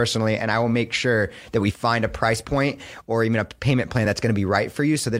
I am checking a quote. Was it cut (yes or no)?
no